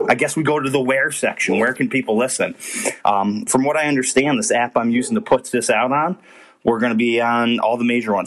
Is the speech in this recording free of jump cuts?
yes; 0 cuts

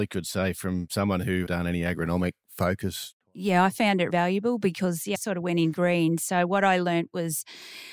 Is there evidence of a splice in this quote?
yes; 4 cuts; at 1.5 s, 4.1 s, 5.1 s, 5.7 s

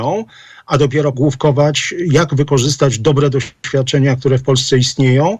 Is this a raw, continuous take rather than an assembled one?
no; 1 cut; at 1.1 s

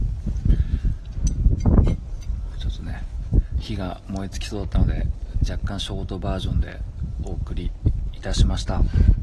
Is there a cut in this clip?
no; 0 cuts

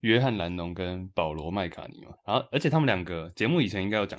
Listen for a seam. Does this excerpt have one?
yes; 1 cut; at 2.2 s

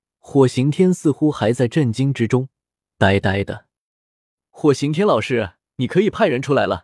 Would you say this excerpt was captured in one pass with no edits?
yes; 0 cuts

